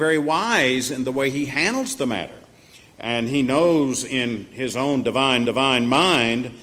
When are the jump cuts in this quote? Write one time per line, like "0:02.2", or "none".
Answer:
0:05.4